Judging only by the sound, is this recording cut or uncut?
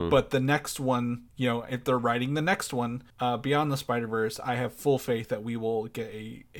cut